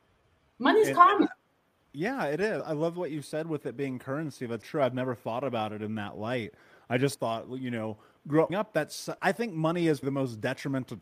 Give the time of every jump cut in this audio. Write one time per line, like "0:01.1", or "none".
0:02.6
0:04.6
0:07.1
0:08.5
0:09.2
0:10.0